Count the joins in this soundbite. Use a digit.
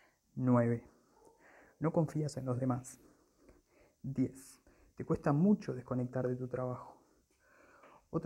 0